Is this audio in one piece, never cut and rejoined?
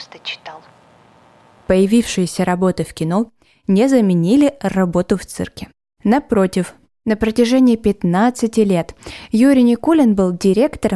yes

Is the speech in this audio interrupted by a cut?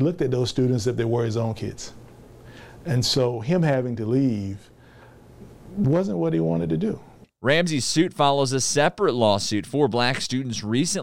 no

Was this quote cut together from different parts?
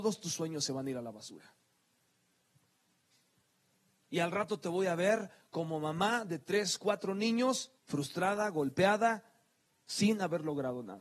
yes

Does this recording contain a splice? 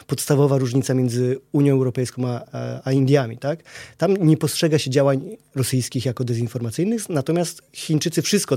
no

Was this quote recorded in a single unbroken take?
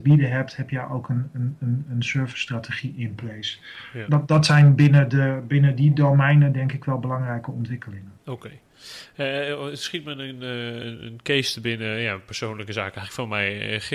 no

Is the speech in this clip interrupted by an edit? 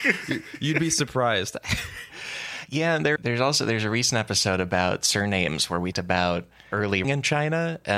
yes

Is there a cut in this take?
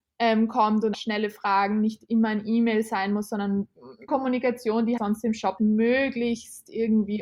yes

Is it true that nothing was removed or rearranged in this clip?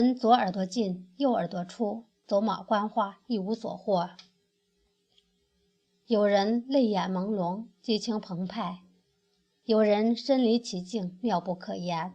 yes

